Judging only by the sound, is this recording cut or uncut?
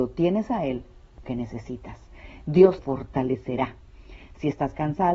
cut